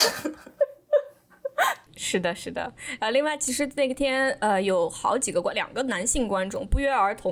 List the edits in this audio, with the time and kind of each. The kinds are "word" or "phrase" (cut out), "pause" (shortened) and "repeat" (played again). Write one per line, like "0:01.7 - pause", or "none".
none